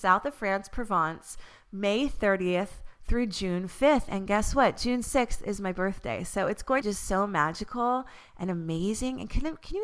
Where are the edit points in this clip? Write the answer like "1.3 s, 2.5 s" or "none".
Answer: 6.8 s

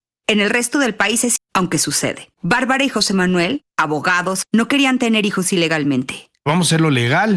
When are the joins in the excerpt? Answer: 1.4 s, 2.3 s, 4.4 s

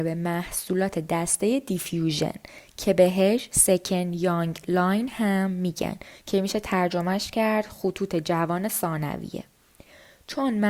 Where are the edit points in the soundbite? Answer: none

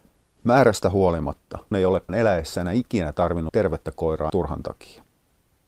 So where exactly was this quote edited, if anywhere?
1.7 s, 2.1 s, 3.5 s, 4.3 s

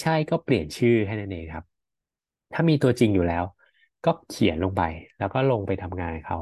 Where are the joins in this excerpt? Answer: none

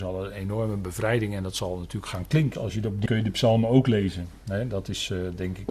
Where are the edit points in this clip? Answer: 2.1 s, 2.5 s, 3.1 s

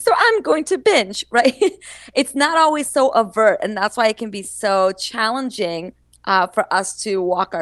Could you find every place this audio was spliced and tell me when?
none

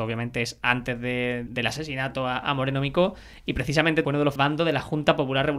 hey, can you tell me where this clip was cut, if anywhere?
1.5 s, 4.0 s, 4.4 s

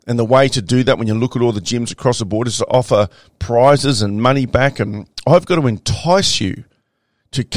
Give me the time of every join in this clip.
none

